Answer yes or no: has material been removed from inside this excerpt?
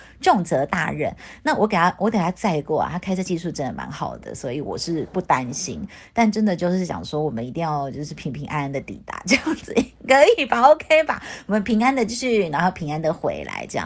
no